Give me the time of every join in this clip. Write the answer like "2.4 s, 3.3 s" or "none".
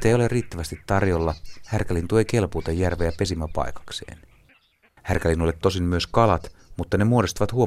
5.6 s